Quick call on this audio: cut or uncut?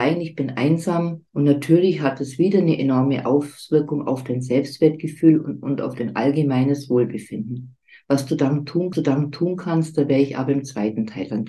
cut